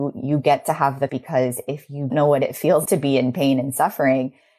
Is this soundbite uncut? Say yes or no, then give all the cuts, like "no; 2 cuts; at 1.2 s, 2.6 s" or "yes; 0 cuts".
no; 3 cuts; at 1.1 s, 2.1 s, 2.8 s